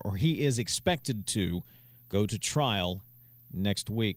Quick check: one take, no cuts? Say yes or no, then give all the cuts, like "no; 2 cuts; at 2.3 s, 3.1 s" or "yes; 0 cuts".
yes; 0 cuts